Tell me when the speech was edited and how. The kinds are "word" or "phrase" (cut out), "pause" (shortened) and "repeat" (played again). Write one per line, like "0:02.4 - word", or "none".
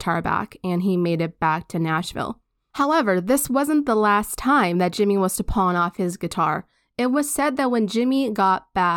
none